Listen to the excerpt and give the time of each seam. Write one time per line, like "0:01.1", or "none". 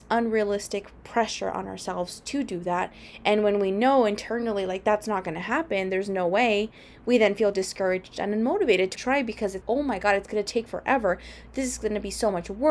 0:08.9
0:09.6